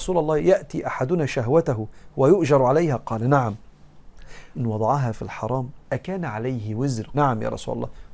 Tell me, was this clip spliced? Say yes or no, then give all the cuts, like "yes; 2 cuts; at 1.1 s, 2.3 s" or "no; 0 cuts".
yes; 3 cuts; at 4.5 s, 5.8 s, 7.1 s